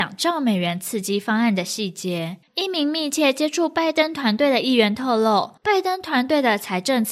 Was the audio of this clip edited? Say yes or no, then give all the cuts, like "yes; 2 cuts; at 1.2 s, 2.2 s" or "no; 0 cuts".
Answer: yes; 2 cuts; at 2.4 s, 5.6 s